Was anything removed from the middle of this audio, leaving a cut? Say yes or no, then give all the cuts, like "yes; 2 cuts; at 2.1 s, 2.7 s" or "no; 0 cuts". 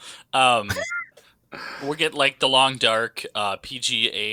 yes; 1 cut; at 1.1 s